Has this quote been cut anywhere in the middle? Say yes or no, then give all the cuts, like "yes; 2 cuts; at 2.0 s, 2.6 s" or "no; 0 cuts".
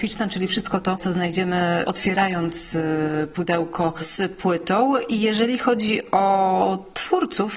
no; 0 cuts